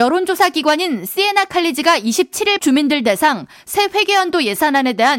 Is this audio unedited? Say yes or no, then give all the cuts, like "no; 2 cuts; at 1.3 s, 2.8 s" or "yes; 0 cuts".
no; 1 cut; at 2.6 s